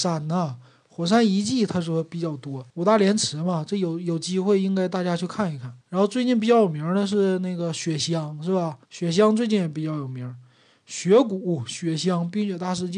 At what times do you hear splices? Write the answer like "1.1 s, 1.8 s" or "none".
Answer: 2.7 s, 5.8 s, 8.8 s

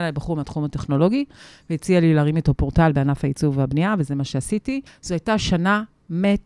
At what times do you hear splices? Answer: 4.9 s

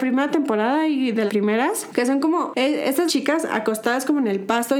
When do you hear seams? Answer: 1.3 s, 3.1 s

